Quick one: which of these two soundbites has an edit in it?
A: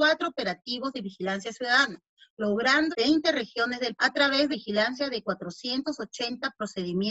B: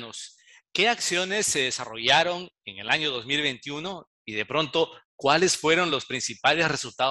A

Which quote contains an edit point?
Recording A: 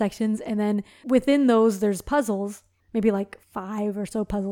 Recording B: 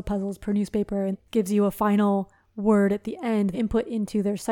B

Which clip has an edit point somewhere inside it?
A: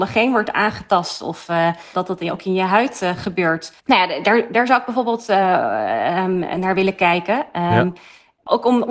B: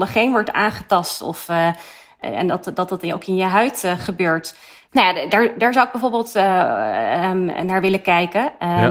A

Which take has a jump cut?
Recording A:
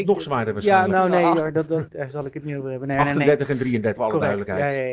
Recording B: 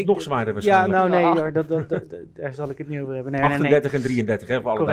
A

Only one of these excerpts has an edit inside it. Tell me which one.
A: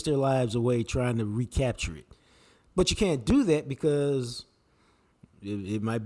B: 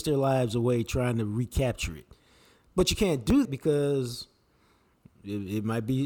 B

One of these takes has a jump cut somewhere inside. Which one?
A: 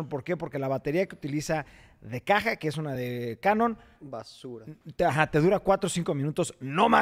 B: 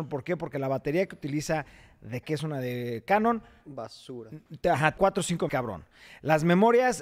B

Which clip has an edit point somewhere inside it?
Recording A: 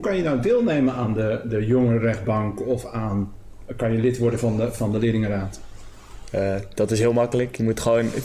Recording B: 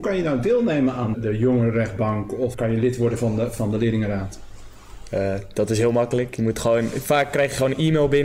B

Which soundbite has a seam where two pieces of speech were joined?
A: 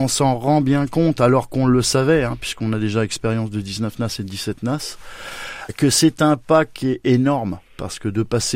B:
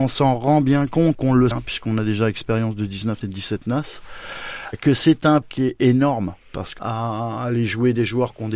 B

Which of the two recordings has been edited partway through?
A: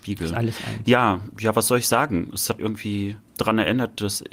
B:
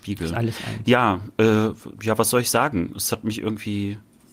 A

